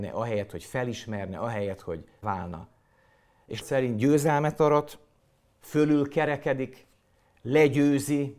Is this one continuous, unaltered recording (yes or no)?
no